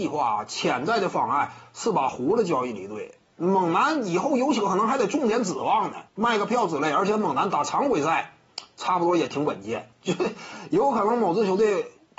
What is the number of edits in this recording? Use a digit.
2